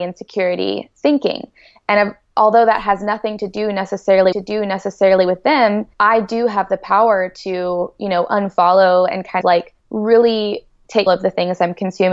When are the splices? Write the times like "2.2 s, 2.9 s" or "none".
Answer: 4.3 s, 5.9 s, 9.4 s, 9.8 s, 11.1 s